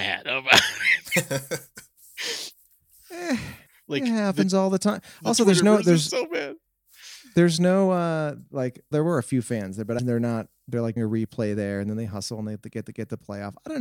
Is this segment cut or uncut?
cut